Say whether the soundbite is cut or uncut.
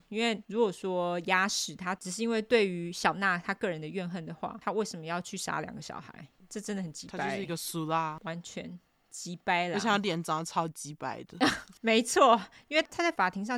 uncut